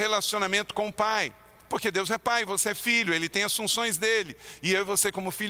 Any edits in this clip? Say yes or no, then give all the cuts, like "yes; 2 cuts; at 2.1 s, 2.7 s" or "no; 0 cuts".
no; 0 cuts